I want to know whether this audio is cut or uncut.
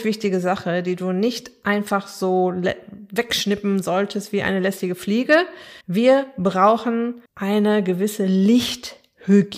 cut